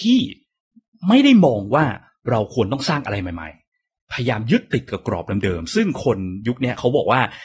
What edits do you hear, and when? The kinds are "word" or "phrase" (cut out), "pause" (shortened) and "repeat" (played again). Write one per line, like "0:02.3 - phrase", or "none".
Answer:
none